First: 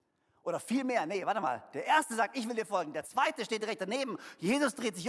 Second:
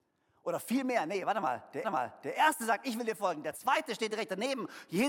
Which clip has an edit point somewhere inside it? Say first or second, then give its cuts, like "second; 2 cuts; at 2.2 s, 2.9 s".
second; 1 cut; at 1.8 s